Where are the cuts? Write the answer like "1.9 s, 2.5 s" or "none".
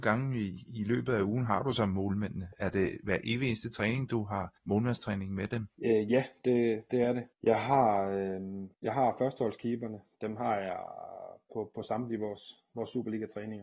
4.6 s, 5.7 s, 7.3 s, 8.7 s